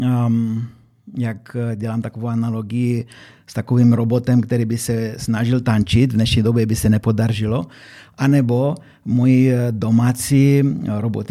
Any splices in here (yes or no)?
no